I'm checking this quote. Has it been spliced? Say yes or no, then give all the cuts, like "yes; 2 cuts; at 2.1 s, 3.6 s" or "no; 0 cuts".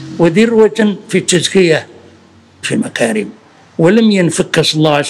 yes; 1 cut; at 2.6 s